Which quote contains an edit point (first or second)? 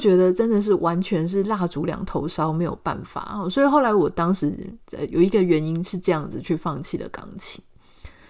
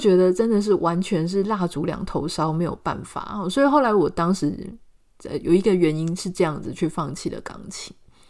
first